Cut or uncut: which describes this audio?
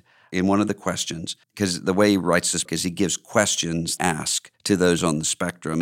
cut